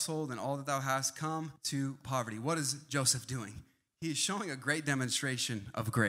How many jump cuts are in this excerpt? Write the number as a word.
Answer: one